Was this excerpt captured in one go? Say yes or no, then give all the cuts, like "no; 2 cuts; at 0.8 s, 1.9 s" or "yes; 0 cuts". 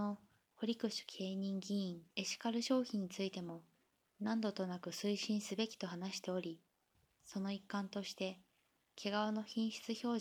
no; 1 cut; at 2.1 s